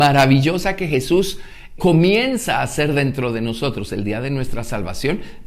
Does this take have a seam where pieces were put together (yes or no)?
yes